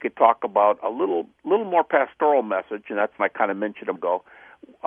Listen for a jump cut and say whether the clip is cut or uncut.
cut